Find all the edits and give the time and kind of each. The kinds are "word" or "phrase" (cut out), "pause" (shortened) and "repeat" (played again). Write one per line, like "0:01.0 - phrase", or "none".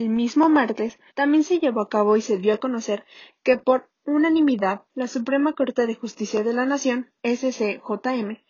0:01.1 - pause
0:04.9 - pause
0:07.2 - pause